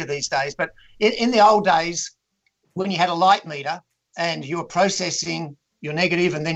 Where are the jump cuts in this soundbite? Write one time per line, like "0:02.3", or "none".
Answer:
none